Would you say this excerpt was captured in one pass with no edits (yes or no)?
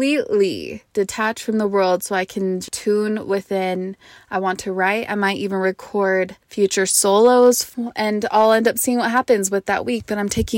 no